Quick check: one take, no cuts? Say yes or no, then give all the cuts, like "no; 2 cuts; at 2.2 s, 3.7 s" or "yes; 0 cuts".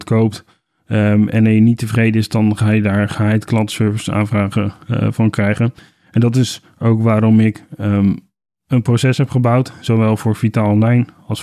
yes; 0 cuts